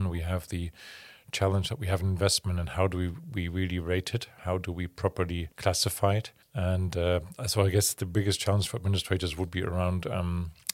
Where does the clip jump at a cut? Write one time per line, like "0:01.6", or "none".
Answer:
0:05.5
0:06.4